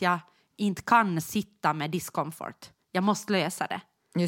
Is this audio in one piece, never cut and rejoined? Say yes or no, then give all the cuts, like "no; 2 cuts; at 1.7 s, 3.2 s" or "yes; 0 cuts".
yes; 0 cuts